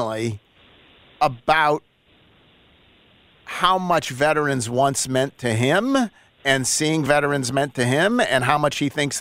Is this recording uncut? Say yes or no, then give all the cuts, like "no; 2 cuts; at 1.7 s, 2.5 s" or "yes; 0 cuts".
yes; 0 cuts